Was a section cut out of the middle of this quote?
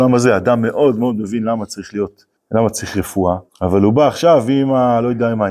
yes; 2 cuts; at 2.4 s, 3.5 s

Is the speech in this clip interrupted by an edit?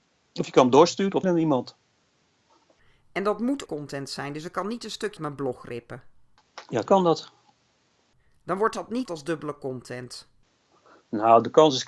yes; 5 cuts; at 1.2 s, 3.7 s, 5.2 s, 6.8 s, 9.0 s

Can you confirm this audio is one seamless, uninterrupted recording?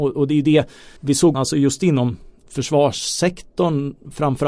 no; 2 cuts; at 1.0 s, 1.3 s

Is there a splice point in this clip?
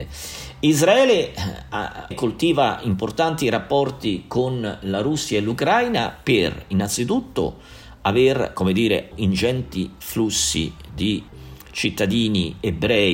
yes; 2 cuts; at 2.1 s, 9.1 s

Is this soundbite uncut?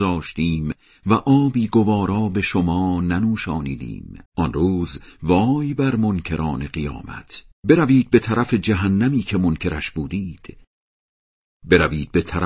no; 2 cuts; at 4.3 s, 7.5 s

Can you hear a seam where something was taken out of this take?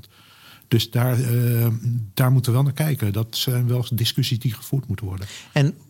no; 0 cuts

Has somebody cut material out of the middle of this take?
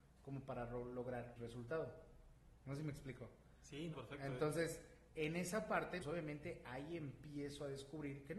yes; 3 cuts; at 1.4 s, 3.9 s, 6.0 s

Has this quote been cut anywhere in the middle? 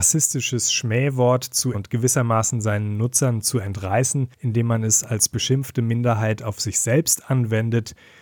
yes; 2 cuts; at 1.7 s, 4.3 s

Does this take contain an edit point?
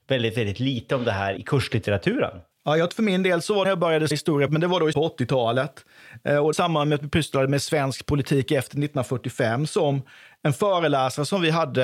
yes; 8 cuts; at 1.4 s, 2.5 s, 2.9 s, 3.6 s, 4.1 s, 4.5 s, 4.9 s, 6.5 s

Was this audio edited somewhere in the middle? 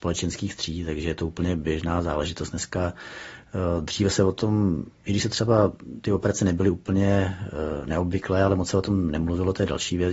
no; 0 cuts

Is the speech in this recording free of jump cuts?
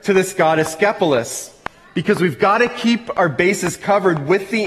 yes; 0 cuts

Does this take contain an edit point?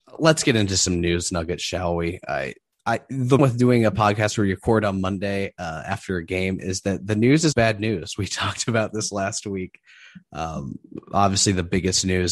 yes; 2 cuts; at 3.4 s, 7.5 s

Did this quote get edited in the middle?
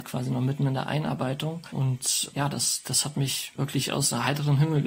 no; 0 cuts

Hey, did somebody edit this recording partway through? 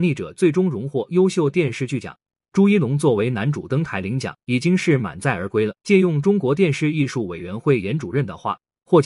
yes; 2 cuts; at 4.4 s, 5.8 s

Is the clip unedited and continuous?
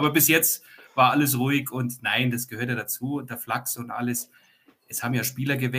yes; 0 cuts

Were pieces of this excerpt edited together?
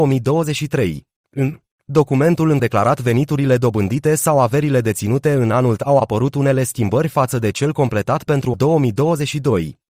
yes; 3 cuts; at 2.6 s, 5.8 s, 8.5 s

